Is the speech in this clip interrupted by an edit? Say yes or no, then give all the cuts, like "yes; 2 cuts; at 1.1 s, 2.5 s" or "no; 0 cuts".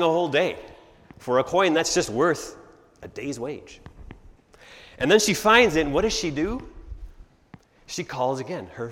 no; 0 cuts